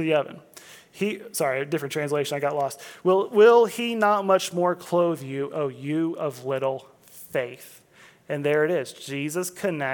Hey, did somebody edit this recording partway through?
no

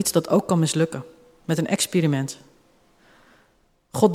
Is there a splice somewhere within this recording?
no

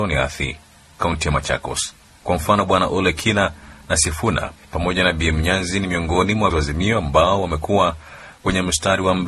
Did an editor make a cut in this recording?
yes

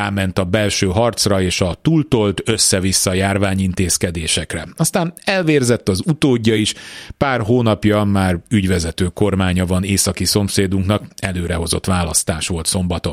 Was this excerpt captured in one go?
yes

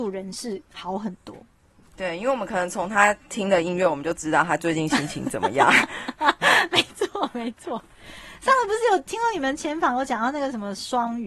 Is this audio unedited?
yes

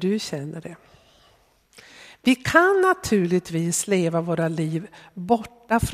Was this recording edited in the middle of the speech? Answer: no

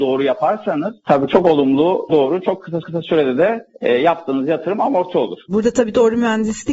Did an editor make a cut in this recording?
yes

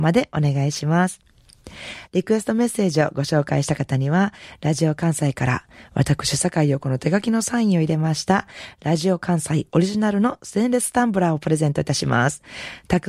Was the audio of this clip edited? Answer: no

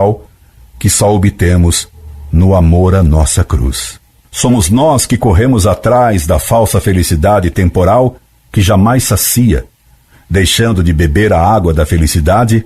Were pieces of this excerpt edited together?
no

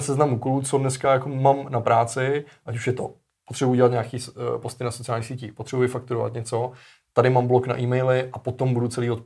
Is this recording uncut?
yes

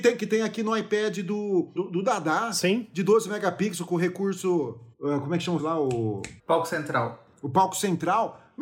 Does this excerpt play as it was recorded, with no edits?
no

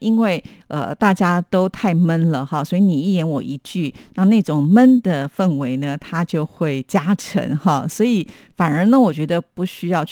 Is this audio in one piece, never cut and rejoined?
yes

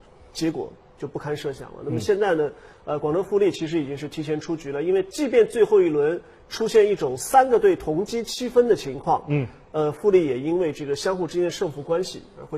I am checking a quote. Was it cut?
no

